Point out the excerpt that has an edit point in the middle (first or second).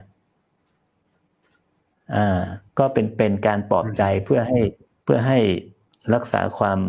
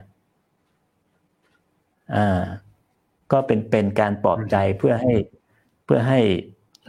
first